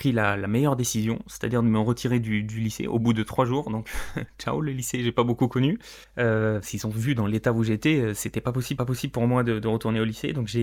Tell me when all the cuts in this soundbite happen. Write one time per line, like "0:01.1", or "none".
0:06.0
0:08.8